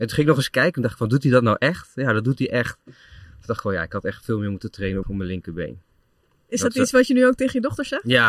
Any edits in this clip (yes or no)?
yes